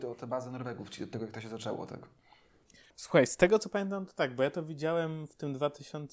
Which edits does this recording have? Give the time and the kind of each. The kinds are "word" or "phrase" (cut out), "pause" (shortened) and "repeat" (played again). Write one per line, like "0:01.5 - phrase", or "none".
0:02.9 - pause